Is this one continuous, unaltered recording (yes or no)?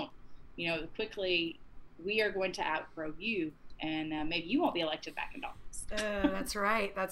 yes